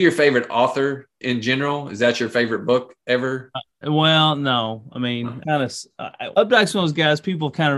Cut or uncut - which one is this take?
cut